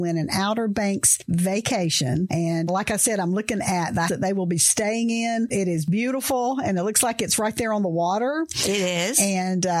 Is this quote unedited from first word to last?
no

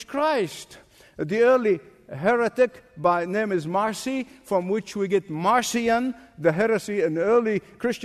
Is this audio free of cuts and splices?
yes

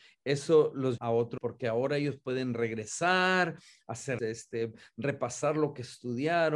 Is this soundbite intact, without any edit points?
no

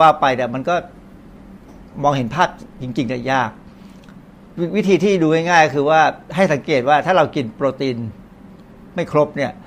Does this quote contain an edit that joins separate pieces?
no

